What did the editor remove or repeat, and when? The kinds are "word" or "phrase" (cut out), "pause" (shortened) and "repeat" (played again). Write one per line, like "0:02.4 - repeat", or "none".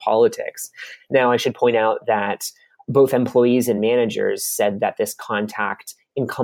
none